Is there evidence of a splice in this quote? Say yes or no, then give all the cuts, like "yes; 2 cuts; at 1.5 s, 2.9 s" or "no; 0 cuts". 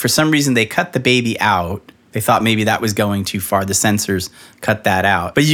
no; 0 cuts